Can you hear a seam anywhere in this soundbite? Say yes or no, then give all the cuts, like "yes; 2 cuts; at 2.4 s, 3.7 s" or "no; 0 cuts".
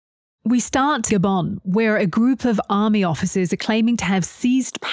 yes; 1 cut; at 1.1 s